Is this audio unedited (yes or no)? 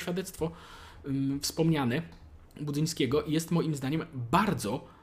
no